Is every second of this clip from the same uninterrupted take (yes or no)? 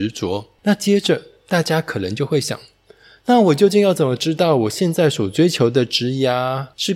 yes